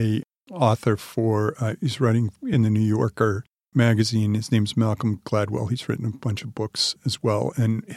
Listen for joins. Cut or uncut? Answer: uncut